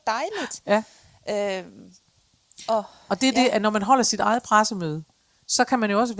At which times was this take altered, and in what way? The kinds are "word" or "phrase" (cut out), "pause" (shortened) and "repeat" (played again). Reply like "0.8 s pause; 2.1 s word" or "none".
none